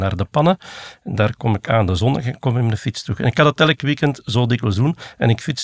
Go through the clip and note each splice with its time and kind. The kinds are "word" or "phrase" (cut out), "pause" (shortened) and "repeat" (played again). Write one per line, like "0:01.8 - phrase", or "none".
none